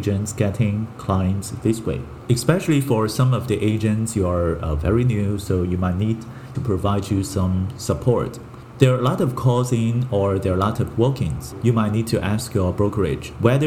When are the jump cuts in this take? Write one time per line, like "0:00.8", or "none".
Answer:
0:06.5